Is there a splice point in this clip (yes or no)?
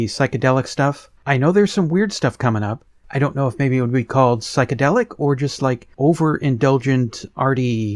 yes